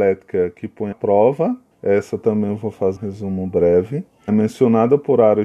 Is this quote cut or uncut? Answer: cut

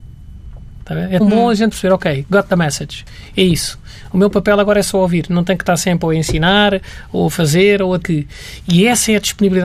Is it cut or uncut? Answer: cut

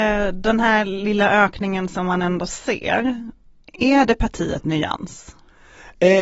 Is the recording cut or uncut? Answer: uncut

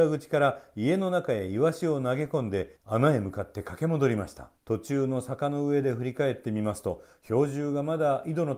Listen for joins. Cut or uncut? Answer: cut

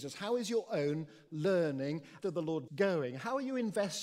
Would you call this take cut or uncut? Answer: cut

